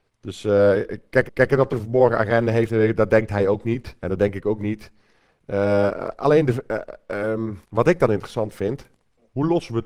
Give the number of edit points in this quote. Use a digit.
4